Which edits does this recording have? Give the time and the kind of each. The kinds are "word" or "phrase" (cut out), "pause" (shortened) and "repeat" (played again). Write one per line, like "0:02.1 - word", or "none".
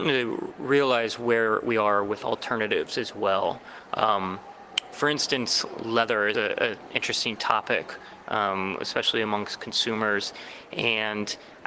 0:06.3 - word